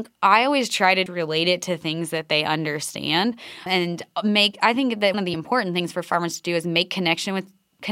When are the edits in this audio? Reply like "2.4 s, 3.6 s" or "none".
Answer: 1.1 s, 3.7 s, 5.1 s